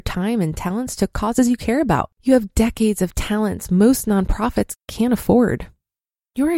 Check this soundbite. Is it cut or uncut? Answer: cut